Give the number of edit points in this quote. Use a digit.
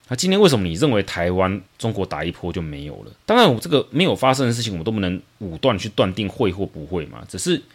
1